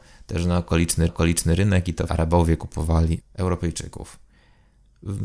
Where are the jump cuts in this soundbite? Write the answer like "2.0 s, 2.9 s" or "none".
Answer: 1.1 s, 2.1 s, 3.2 s